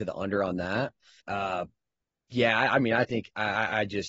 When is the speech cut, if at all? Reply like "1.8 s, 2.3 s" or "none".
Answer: 1.2 s